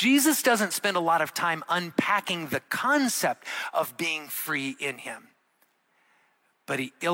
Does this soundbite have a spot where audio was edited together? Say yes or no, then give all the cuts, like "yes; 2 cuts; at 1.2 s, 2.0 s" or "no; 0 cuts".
no; 0 cuts